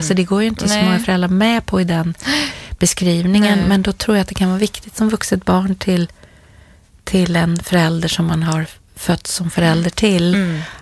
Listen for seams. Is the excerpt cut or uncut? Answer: uncut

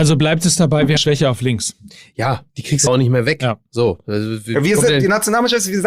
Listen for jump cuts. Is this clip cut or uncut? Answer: cut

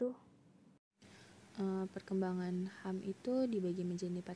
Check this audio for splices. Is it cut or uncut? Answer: uncut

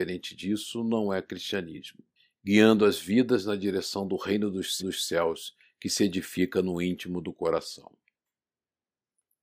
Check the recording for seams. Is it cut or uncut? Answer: cut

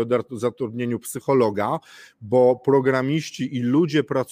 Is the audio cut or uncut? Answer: uncut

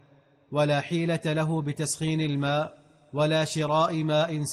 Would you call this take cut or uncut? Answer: uncut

